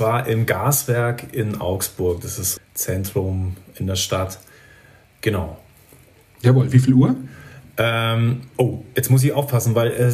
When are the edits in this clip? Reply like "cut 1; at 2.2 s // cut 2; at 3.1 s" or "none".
cut 1; at 2.6 s